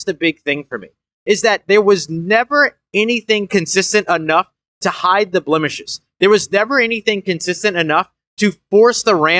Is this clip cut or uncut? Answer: uncut